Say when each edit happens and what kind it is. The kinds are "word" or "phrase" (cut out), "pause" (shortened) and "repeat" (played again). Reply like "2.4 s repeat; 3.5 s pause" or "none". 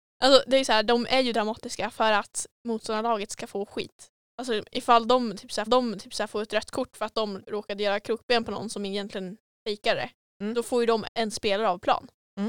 2.6 s pause; 5.7 s repeat; 7.4 s word; 11.1 s word